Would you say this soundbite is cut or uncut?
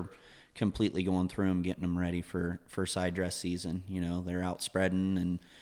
uncut